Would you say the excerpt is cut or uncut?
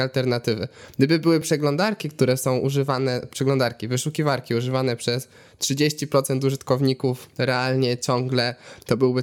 uncut